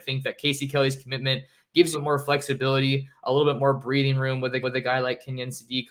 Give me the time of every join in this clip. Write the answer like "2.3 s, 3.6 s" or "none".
1.9 s, 4.6 s